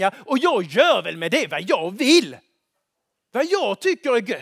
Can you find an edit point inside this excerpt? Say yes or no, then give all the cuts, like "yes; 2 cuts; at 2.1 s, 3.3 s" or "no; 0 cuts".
no; 0 cuts